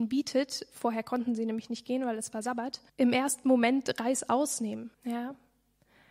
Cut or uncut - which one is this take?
cut